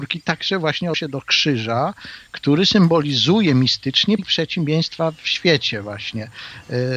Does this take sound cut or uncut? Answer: cut